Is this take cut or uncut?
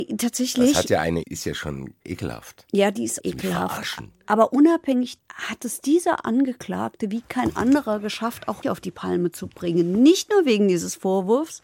cut